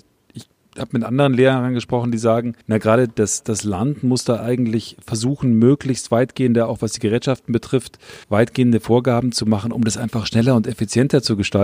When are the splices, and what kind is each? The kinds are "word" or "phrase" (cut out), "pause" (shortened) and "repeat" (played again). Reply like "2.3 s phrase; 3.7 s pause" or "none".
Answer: 2.6 s pause; 8.2 s pause